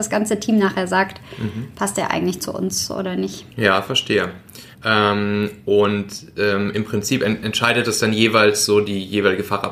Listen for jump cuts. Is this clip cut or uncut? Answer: cut